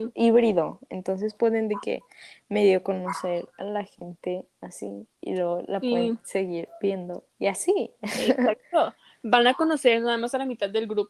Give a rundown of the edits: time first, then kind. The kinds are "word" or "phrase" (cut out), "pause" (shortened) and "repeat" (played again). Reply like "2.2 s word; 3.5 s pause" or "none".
5.1 s pause